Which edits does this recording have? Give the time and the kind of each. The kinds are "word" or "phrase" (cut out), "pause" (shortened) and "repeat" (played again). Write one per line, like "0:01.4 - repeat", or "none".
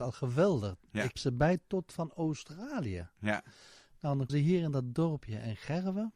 0:01.1 - word
0:04.3 - word